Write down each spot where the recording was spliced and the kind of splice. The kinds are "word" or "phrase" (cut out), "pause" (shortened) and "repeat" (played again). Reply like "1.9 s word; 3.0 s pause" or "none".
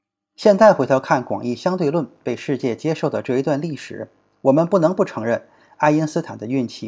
none